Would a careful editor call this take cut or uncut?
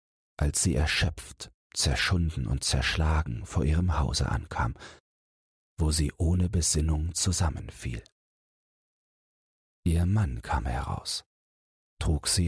uncut